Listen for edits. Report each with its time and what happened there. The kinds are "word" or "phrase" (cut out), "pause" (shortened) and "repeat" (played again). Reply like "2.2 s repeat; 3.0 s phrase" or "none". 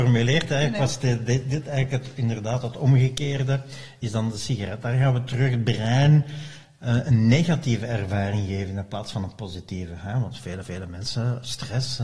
10.6 s repeat

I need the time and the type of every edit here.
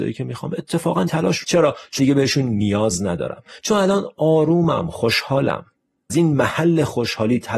1.1 s word; 1.4 s word; 2.0 s word; 3.6 s word; 6.1 s word

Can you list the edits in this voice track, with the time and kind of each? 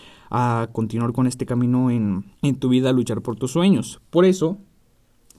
2.3 s pause

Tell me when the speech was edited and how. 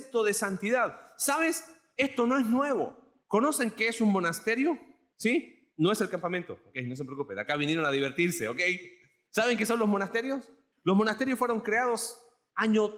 none

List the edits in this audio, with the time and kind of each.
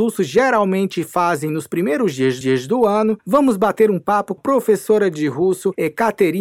2.4 s repeat; 4.4 s word

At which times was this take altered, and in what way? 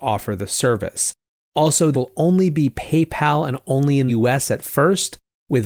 1.9 s word; 4.1 s word

